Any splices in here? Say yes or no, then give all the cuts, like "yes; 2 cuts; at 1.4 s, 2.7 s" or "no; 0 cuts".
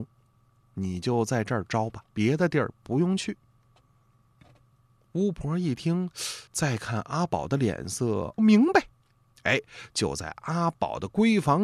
yes; 3 cuts; at 2.1 s, 6.5 s, 8.4 s